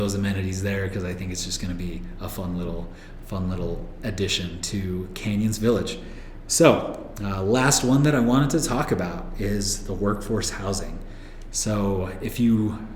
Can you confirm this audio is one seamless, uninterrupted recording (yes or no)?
yes